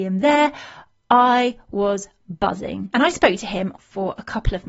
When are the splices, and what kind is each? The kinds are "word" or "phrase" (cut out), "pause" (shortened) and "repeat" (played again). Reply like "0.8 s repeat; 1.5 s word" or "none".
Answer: 3.8 s phrase

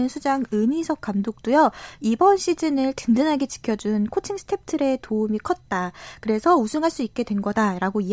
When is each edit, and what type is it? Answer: none

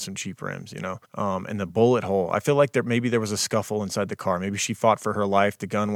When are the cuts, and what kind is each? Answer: 1.0 s pause

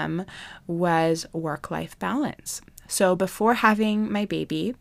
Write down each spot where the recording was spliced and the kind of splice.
none

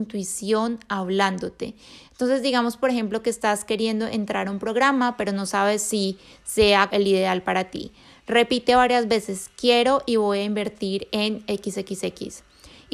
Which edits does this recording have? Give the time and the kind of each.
6.9 s word

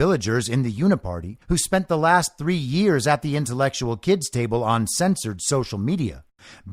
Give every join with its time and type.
1.4 s pause

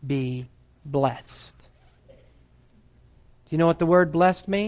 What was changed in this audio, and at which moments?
none

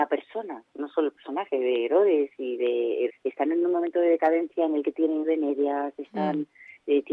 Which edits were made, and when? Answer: 3.1 s word; 5.2 s word

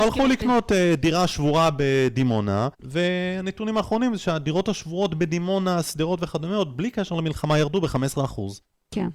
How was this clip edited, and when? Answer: 2.7 s pause

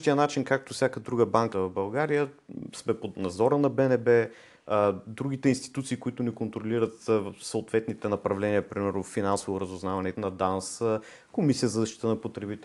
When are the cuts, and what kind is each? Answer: 1.5 s word; 10.2 s phrase

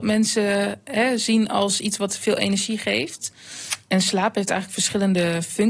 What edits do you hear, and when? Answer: none

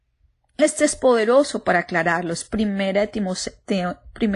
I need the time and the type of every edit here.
none

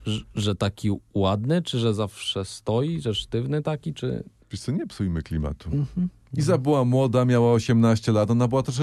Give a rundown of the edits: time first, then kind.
4.4 s pause

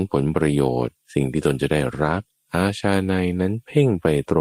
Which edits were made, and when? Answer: 1.0 s pause; 2.4 s pause

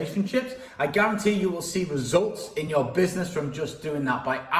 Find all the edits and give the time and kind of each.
none

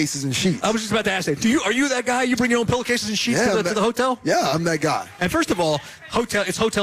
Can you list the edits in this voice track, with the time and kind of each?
none

